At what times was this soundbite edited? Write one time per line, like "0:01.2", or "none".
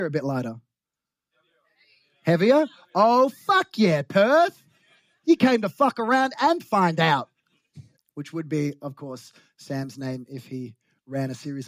0:08.0